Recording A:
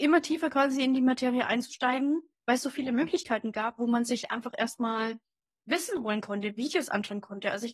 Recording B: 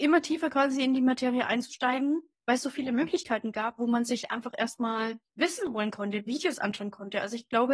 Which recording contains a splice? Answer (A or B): B